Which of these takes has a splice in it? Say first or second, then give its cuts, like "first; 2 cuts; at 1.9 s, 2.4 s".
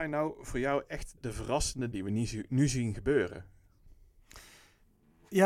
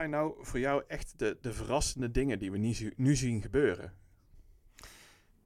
first; 2 cuts; at 1.2 s, 1.9 s